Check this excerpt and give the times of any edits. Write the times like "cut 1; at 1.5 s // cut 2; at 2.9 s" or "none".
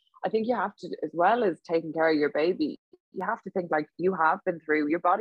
none